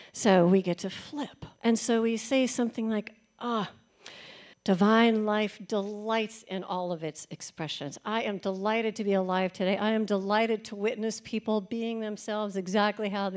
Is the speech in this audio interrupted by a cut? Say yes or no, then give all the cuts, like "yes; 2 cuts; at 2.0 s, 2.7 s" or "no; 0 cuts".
yes; 2 cuts; at 1.6 s, 4.5 s